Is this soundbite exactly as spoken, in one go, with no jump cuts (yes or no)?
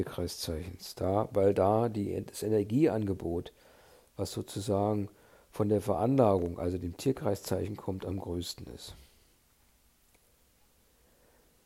yes